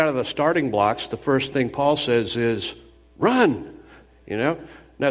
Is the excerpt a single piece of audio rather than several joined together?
yes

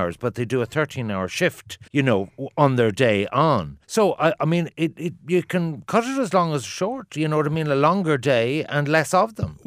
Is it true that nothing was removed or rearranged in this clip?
no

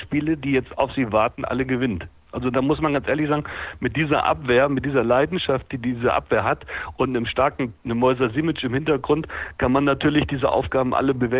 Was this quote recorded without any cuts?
yes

